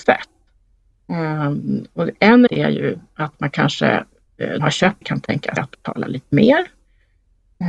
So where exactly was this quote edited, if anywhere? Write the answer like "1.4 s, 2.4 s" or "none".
2.5 s, 4.6 s, 5.0 s, 5.6 s